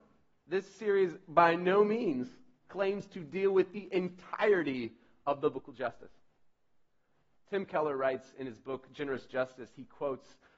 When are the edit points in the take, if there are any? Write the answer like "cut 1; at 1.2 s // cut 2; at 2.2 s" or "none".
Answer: none

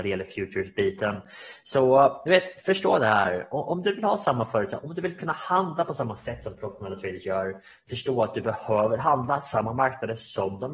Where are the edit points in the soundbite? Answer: none

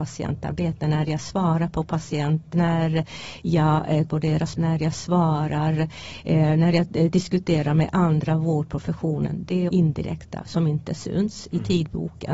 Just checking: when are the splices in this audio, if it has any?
cut 1; at 2.5 s // cut 2; at 4.1 s // cut 3; at 4.6 s // cut 4; at 9.7 s

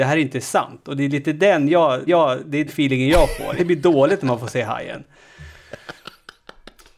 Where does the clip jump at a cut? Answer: cut 1; at 2.1 s // cut 2; at 2.7 s // cut 3; at 3.6 s

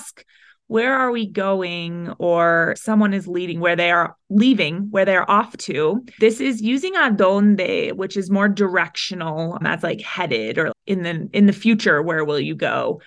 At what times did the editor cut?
cut 1; at 2.8 s // cut 2; at 6.2 s // cut 3; at 9.6 s // cut 4; at 10.7 s

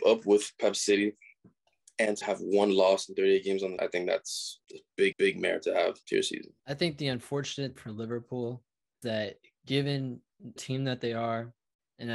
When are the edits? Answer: cut 1; at 2.2 s // cut 2; at 3.8 s // cut 3; at 4.6 s // cut 4; at 5.1 s // cut 5; at 6.0 s // cut 6; at 6.6 s // cut 7; at 7.8 s // cut 8; at 9.0 s // cut 9; at 10.6 s

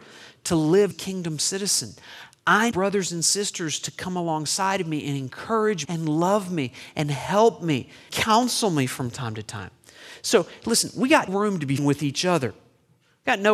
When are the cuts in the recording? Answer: cut 1; at 0.9 s // cut 2; at 2.7 s // cut 3; at 5.8 s // cut 4; at 8.1 s // cut 5; at 11.3 s // cut 6; at 11.8 s

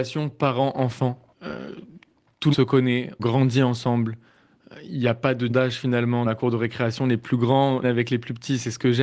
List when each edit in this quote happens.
cut 1; at 1.3 s // cut 2; at 2.5 s // cut 3; at 3.2 s // cut 4; at 5.5 s // cut 5; at 6.2 s // cut 6; at 7.8 s

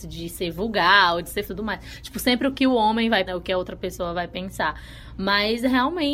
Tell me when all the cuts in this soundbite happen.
cut 1; at 1.5 s // cut 2; at 3.3 s

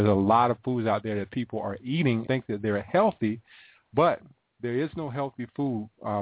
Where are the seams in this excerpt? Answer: cut 1; at 2.3 s

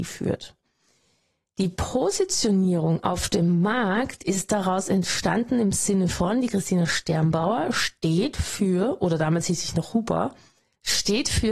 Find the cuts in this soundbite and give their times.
none

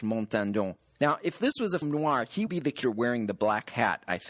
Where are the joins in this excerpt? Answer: cut 1; at 1.8 s // cut 2; at 2.5 s // cut 3; at 2.8 s

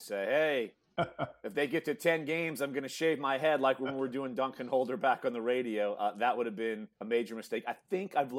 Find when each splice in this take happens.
cut 1; at 6.9 s

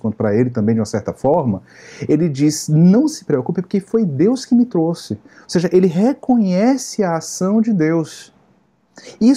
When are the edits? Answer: none

